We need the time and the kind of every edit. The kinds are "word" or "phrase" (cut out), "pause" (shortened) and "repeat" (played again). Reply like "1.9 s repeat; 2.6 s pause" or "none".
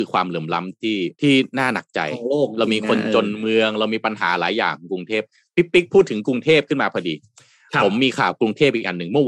1.1 s pause